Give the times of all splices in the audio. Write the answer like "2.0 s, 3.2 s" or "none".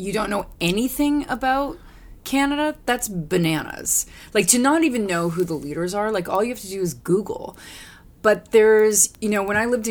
none